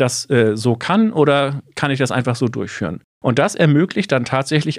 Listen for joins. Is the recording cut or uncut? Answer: cut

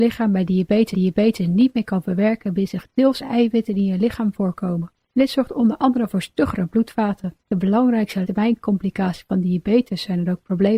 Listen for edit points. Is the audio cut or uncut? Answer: cut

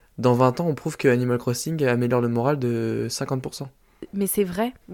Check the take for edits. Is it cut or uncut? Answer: uncut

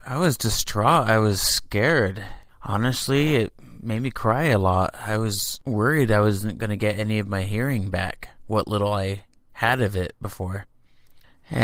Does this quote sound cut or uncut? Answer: uncut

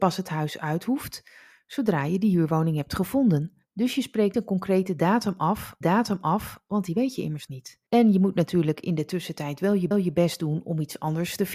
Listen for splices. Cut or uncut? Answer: cut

